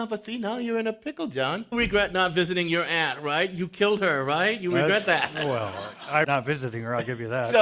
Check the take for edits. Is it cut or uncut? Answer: cut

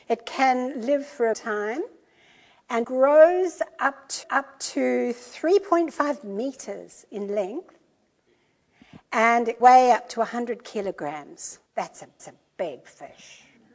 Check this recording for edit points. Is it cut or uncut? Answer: cut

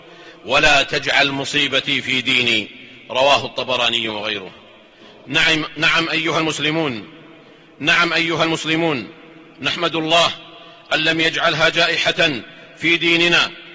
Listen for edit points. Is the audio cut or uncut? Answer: uncut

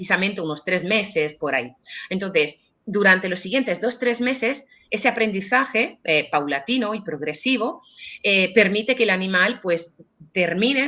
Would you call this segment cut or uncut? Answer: uncut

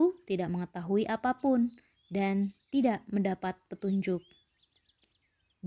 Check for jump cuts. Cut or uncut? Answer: uncut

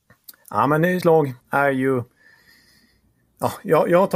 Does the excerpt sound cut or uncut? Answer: cut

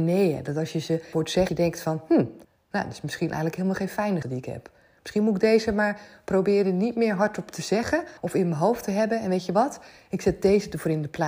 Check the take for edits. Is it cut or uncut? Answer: cut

